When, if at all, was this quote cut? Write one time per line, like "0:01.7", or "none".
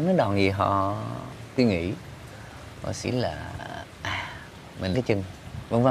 0:01.6
0:03.0
0:04.9